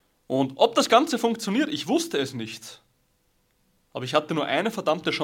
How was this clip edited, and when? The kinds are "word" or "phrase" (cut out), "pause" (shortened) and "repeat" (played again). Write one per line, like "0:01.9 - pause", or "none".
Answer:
none